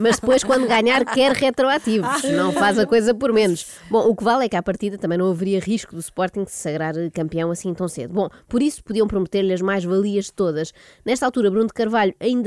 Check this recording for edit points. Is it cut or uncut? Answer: uncut